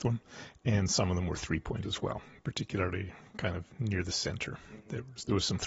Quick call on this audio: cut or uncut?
cut